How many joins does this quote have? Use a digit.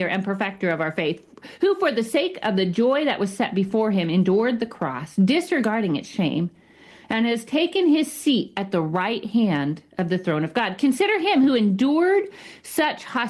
0